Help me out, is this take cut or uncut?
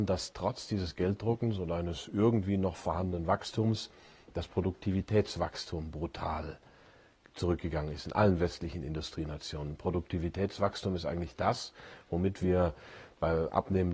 uncut